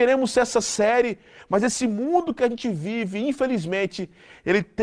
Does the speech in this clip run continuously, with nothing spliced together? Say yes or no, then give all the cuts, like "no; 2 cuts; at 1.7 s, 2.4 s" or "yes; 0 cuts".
yes; 0 cuts